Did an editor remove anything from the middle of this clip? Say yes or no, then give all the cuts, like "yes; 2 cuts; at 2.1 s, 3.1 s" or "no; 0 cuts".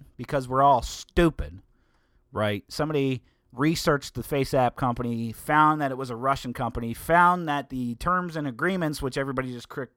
no; 0 cuts